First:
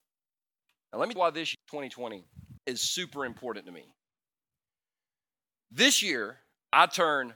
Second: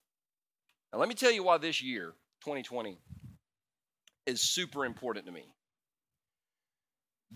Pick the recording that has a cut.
first; 3 cuts; at 1.2 s, 1.5 s, 2.6 s

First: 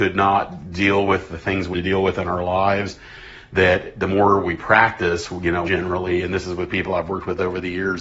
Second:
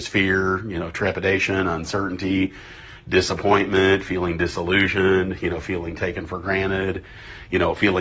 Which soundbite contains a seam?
first; 3 cuts; at 1.7 s, 5.7 s, 6.7 s

